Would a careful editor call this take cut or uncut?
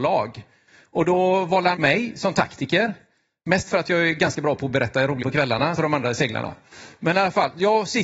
cut